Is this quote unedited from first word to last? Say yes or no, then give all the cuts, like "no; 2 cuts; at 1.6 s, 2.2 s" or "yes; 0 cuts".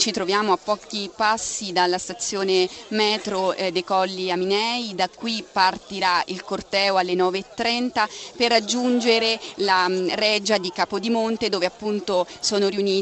yes; 0 cuts